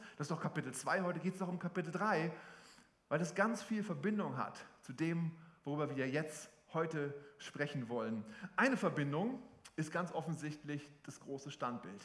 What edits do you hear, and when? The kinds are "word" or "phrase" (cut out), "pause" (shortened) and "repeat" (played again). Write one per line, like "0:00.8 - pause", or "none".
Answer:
none